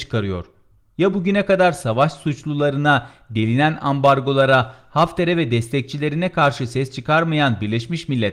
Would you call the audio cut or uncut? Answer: uncut